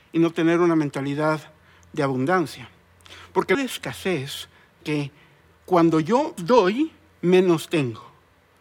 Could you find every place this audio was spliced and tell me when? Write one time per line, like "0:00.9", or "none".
0:03.5
0:04.8
0:06.4